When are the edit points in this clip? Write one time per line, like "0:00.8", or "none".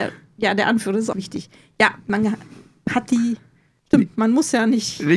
0:01.1

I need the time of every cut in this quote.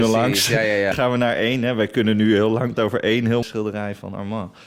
0:00.9
0:02.8
0:03.4

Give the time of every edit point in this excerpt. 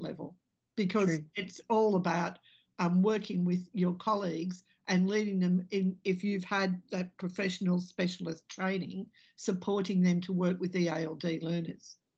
none

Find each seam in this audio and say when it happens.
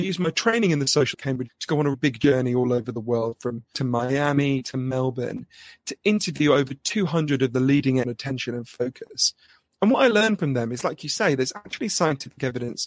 0:01.1
0:01.5
0:01.9
0:03.7
0:08.0

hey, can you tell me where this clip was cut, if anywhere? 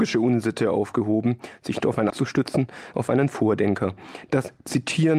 0:01.8
0:02.1
0:02.9

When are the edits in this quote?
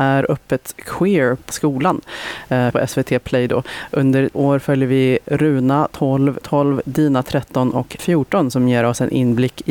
0:01.5
0:02.7
0:04.3
0:06.4
0:08.0

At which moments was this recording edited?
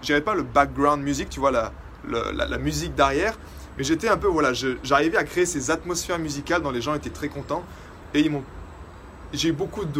none

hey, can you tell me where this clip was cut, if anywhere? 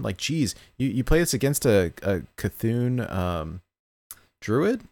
none

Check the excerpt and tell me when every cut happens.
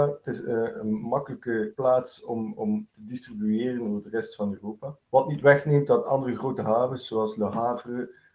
0:05.1

